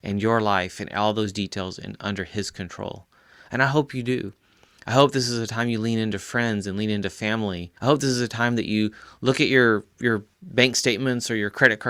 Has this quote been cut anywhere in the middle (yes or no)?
yes